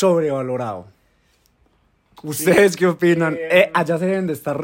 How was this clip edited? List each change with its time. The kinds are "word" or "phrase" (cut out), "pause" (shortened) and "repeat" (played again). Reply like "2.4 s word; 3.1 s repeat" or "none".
none